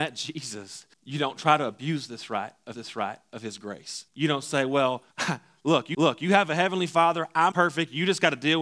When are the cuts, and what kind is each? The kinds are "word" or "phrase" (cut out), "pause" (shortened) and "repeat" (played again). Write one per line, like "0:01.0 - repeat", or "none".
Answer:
0:00.9 - pause
0:02.7 - repeat
0:04.1 - pause
0:05.1 - pause
0:05.9 - repeat
0:07.5 - word